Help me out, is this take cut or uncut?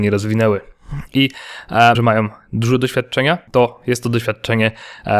cut